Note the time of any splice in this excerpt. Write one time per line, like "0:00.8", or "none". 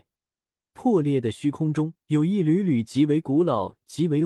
0:02.0